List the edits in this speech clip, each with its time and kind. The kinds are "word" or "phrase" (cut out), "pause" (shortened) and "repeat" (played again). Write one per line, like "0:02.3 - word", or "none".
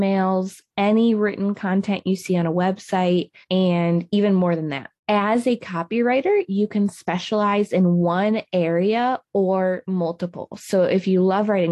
0:03.4 - pause
0:05.0 - pause